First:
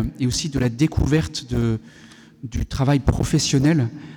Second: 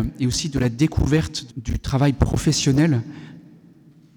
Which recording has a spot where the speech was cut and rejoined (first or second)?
second